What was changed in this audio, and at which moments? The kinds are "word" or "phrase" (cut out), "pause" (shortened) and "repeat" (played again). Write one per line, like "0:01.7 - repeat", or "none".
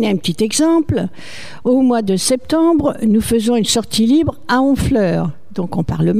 none